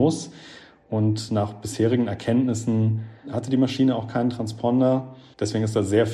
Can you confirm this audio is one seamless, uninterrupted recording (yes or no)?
yes